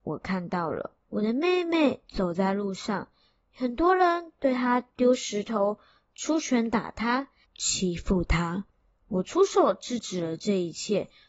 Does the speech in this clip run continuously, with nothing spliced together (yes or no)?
yes